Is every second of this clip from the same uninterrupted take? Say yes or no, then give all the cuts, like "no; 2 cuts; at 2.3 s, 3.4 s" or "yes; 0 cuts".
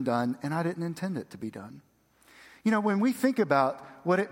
yes; 0 cuts